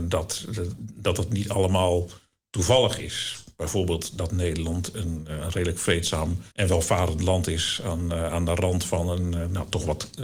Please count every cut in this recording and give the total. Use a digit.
1